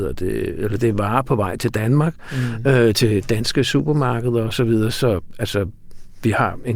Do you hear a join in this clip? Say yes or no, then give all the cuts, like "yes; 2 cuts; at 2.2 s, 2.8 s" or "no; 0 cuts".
no; 0 cuts